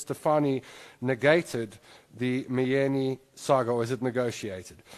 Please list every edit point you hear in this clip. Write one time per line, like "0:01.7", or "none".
none